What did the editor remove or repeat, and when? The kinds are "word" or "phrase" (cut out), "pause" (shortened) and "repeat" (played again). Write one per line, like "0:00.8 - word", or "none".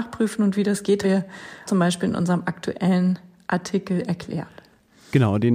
0:01.0 - word
0:01.7 - word